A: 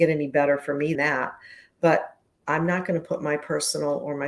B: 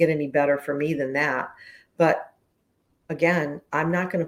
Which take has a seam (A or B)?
A